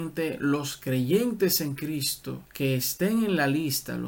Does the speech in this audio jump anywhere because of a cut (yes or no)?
yes